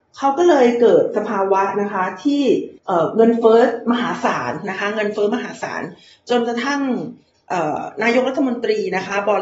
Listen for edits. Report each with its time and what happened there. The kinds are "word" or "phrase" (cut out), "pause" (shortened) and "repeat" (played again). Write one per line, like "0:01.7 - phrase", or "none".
0:02.8 - pause